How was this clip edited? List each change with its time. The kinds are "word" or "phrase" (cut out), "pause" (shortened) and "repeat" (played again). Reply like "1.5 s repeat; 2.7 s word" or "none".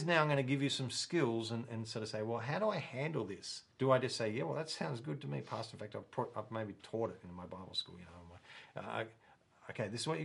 3.7 s pause